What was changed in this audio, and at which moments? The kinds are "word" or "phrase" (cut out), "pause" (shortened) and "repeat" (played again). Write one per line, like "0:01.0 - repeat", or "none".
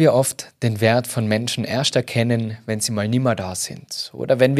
none